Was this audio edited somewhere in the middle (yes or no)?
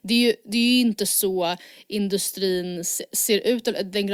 no